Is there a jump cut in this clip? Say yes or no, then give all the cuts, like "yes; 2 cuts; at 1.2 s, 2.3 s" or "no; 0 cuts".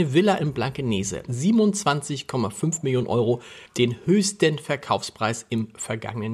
yes; 2 cuts; at 1.3 s, 3.7 s